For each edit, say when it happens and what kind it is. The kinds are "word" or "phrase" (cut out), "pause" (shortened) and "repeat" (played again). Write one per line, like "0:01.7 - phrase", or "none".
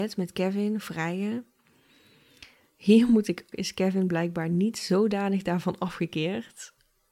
0:03.5 - phrase